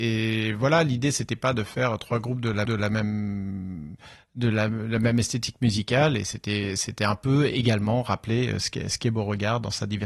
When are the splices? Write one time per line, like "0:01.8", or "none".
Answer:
0:02.7

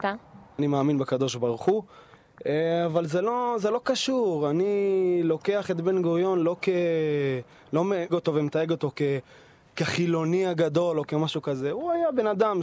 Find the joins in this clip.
0:08.1

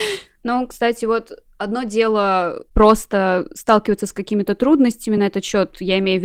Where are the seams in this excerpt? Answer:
none

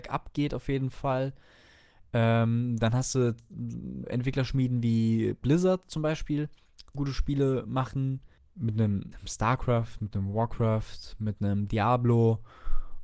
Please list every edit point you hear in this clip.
0:04.0
0:06.9
0:09.1

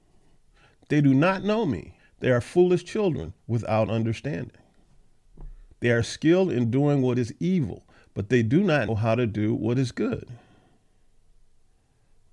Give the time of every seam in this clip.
0:02.0
0:05.7
0:08.9

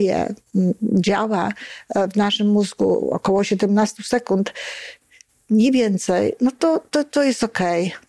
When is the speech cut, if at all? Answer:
none

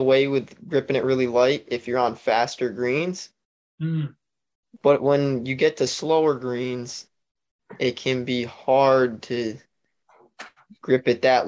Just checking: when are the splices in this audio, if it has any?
none

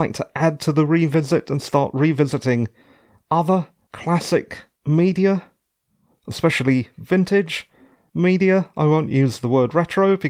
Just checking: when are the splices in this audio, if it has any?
none

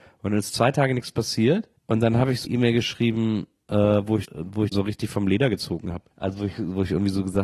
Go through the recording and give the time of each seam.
0:01.8
0:02.4
0:04.2
0:04.7
0:06.1

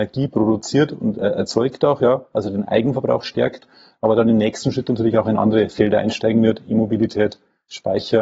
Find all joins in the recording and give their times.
none

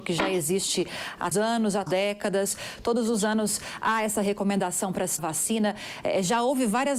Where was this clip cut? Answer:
0:01.3
0:01.9
0:05.2

